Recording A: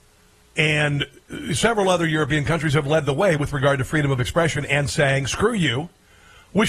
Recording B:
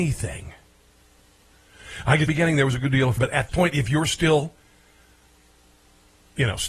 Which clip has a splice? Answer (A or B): B